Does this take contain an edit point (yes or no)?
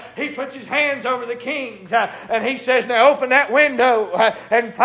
no